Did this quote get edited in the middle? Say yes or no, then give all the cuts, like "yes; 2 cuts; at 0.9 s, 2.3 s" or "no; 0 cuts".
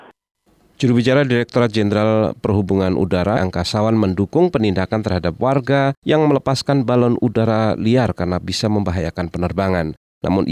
yes; 2 cuts; at 3.4 s, 6.0 s